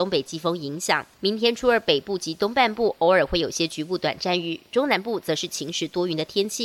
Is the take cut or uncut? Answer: cut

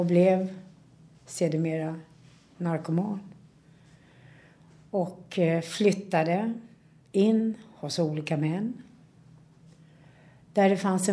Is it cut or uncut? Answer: uncut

